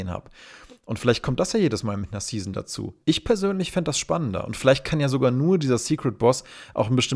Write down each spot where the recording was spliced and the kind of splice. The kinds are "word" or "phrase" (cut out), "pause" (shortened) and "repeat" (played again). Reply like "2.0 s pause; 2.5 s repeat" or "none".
3.0 s pause